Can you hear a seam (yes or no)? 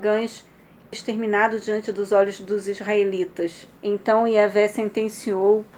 yes